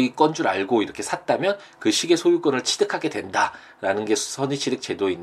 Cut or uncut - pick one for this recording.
uncut